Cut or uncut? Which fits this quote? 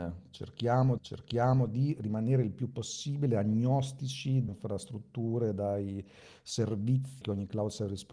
cut